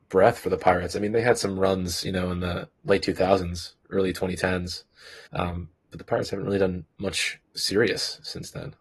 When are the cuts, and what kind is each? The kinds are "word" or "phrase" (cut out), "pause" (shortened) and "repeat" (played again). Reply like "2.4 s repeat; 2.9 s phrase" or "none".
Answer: 2.8 s pause; 3.8 s pause; 5.3 s pause; 7.4 s pause